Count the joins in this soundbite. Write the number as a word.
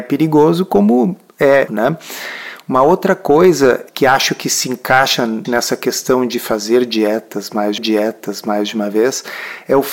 three